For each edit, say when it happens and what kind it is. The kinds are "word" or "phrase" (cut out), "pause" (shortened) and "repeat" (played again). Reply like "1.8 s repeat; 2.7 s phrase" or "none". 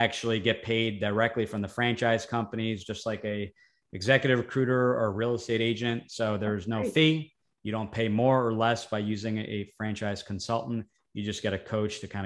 none